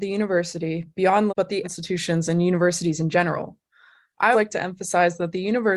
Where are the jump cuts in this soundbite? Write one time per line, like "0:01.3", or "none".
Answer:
0:01.3
0:01.6
0:04.3

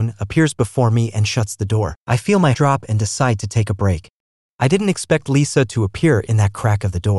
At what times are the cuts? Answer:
0:02.0
0:02.5

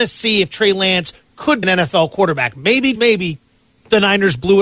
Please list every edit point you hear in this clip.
0:01.6
0:02.9

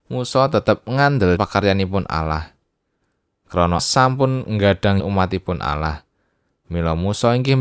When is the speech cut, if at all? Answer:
0:01.4
0:03.8
0:05.0

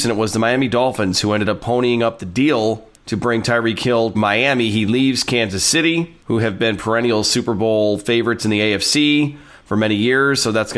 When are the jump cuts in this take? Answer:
0:03.0
0:04.1
0:06.2

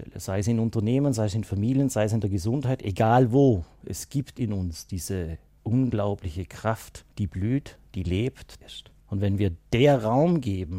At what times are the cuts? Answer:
0:05.6
0:07.1
0:08.6
0:09.0

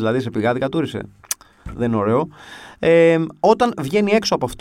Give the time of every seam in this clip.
none

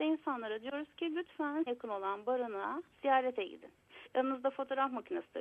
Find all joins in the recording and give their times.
0:01.7
0:02.9
0:04.1

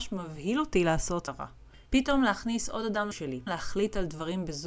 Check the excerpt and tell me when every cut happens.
0:01.3
0:01.9
0:03.1
0:03.5

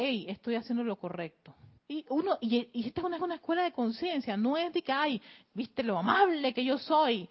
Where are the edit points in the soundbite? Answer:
0:01.8
0:03.2
0:05.4

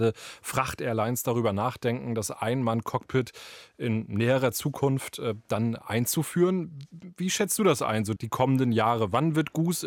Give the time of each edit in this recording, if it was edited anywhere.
0:08.2

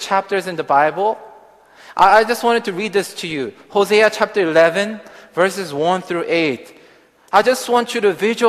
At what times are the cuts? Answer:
none

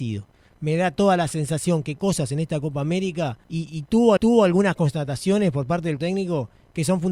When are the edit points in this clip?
0:02.0
0:03.4
0:04.2
0:06.0

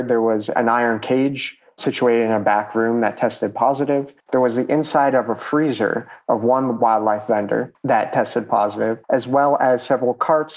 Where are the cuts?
0:04.2
0:09.0

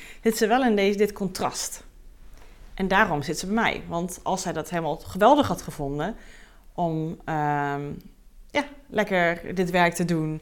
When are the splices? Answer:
0:08.5

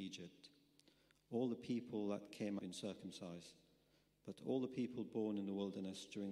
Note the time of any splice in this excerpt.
0:02.6

